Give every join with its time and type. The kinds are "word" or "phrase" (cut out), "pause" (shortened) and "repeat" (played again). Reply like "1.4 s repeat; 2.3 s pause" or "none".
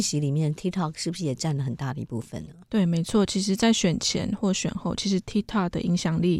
none